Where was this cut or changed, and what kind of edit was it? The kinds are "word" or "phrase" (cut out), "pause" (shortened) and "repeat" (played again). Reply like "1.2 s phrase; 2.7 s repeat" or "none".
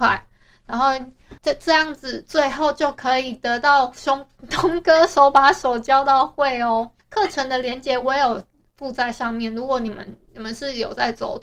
1.4 s pause; 7.0 s pause